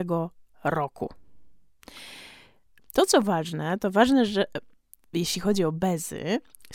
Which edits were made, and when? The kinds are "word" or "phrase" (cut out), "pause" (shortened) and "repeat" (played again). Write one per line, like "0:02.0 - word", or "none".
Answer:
none